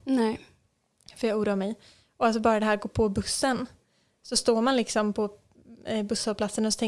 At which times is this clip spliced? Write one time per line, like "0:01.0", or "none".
none

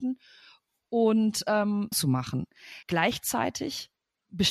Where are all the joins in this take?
0:01.9
0:02.8

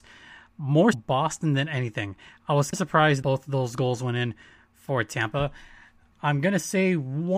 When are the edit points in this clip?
0:00.9
0:02.7
0:03.2

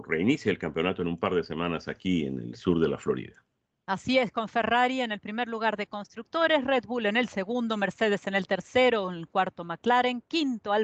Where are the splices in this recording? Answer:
none

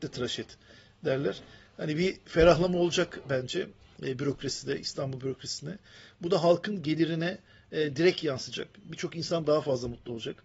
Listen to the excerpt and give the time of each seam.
none

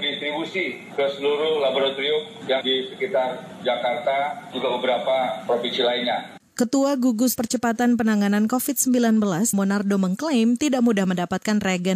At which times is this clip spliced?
0:02.6
0:04.5
0:07.4
0:09.5

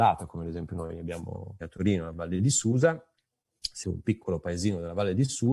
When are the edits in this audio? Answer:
0:01.6
0:02.1
0:03.8

